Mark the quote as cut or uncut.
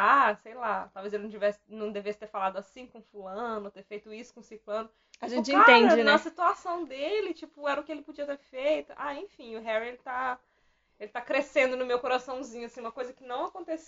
uncut